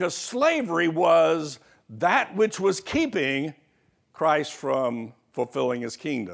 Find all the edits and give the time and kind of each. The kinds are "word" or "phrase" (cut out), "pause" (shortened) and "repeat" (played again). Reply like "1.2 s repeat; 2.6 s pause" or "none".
none